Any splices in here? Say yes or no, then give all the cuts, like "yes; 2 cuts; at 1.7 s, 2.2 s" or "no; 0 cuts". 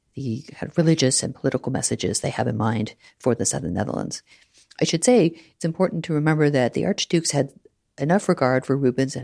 no; 0 cuts